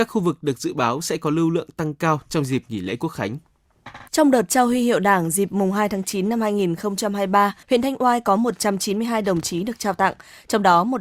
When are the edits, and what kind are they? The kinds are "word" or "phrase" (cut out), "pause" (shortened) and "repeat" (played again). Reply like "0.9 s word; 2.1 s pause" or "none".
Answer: 4.1 s pause; 7.6 s pause